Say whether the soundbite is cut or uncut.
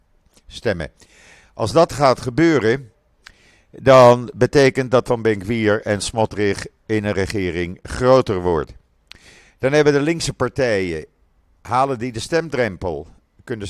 cut